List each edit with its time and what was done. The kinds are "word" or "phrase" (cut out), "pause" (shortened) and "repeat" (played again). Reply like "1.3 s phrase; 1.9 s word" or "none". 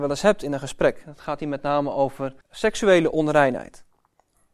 2.4 s pause